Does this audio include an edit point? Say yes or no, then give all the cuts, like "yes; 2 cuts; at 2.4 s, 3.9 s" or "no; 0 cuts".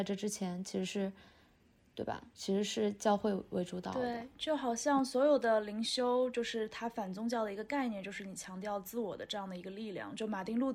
no; 0 cuts